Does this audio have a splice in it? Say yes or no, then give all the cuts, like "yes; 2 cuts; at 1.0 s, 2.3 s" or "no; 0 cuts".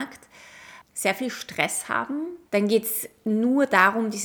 yes; 1 cut; at 2.5 s